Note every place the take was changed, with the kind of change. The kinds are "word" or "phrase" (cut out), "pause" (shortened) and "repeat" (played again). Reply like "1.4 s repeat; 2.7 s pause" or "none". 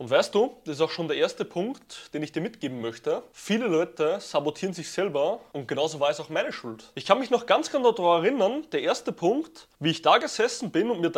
9.7 s pause